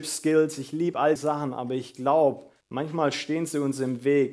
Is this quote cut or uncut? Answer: cut